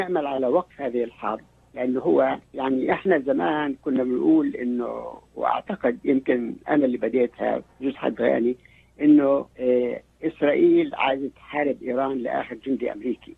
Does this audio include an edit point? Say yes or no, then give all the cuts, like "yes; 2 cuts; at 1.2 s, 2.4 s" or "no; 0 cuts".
yes; 2 cuts; at 2.4 s, 9.5 s